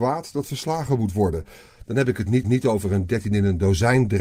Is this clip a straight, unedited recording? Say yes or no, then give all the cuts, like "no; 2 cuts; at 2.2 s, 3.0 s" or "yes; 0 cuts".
no; 1 cut; at 2.4 s